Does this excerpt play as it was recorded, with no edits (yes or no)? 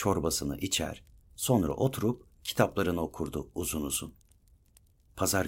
yes